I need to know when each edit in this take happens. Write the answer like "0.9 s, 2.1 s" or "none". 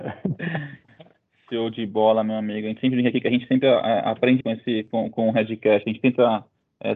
4.4 s